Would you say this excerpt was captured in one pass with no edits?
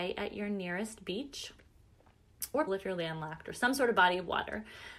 no; 1 cut; at 2.7 s

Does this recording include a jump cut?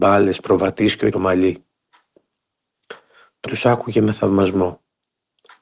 yes; 2 cuts; at 1.1 s, 3.5 s

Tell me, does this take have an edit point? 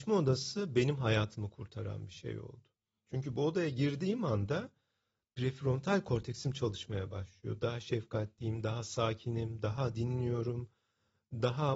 no; 0 cuts

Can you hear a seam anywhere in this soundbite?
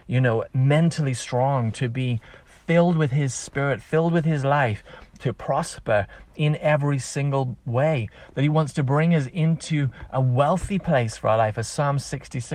no; 0 cuts

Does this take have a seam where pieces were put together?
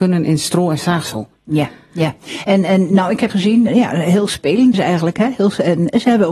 yes; 3 cuts; at 3.3 s, 3.7 s, 4.7 s

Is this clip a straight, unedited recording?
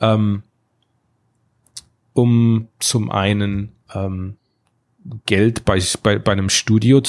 no; 1 cut; at 2.7 s

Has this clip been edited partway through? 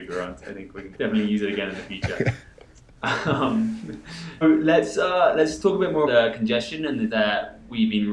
yes; 4 cuts; at 0.9 s, 4.4 s, 6.1 s, 7.1 s

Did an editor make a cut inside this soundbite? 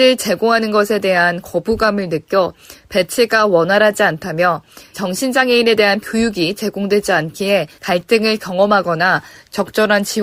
yes; 3 cuts; at 4.9 s, 6.0 s, 7.8 s

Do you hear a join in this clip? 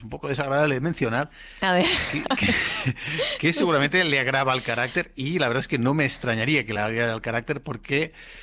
no; 0 cuts

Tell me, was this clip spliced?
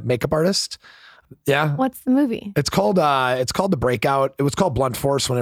no; 0 cuts

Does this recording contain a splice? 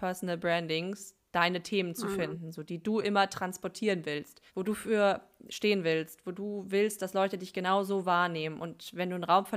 yes; 1 cut; at 4.5 s

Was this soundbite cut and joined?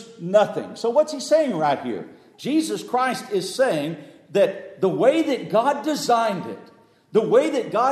no; 0 cuts

